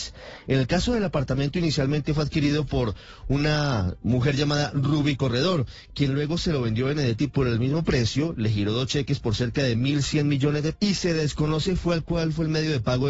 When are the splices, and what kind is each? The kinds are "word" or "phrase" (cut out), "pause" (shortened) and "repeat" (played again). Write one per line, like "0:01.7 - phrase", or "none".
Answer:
0:10.8 - word

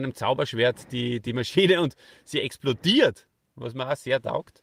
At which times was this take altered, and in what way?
none

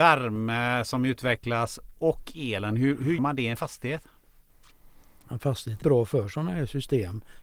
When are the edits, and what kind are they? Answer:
0:03.2 - word
0:05.8 - phrase

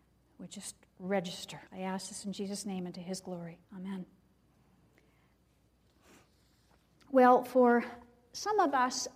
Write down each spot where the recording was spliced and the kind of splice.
0:01.7 - pause
0:03.6 - pause

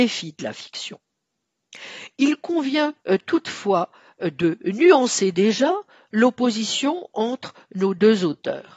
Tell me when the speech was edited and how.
none

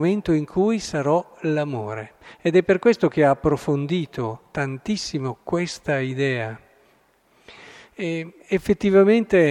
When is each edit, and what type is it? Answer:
none

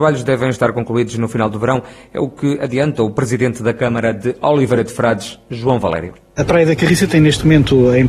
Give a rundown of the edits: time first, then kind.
none

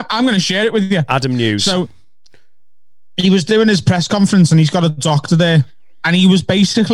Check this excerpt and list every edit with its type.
none

